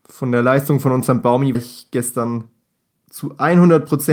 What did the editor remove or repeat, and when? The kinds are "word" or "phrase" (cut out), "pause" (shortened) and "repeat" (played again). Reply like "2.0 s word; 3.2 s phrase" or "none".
1.5 s word